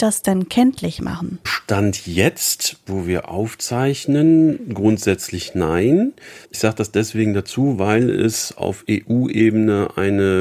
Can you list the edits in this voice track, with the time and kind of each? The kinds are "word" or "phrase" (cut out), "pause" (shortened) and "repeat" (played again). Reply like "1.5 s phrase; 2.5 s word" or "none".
6.4 s pause